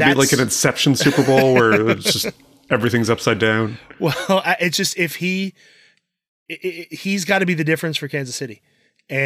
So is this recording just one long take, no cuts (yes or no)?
yes